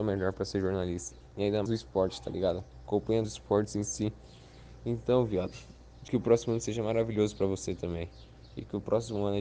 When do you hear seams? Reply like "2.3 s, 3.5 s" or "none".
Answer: 1.7 s, 3.2 s, 6.1 s